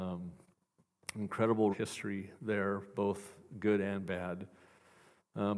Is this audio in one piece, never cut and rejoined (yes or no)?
no